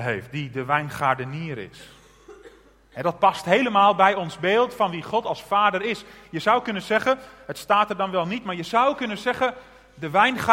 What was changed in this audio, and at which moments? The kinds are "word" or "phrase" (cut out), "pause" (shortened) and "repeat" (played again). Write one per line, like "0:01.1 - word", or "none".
none